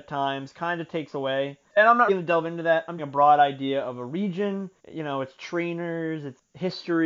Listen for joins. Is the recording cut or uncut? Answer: cut